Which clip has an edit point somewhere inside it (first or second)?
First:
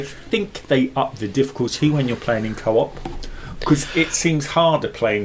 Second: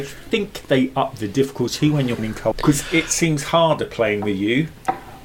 second